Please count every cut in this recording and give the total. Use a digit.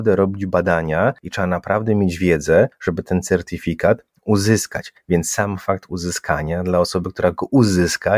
0